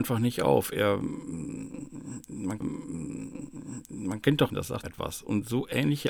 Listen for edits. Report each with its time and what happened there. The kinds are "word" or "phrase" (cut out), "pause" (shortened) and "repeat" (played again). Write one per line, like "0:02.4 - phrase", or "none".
0:02.6 - repeat
0:04.5 - word
0:04.8 - phrase